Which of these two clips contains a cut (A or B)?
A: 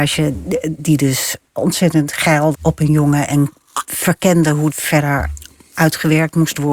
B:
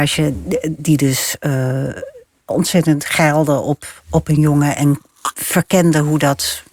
A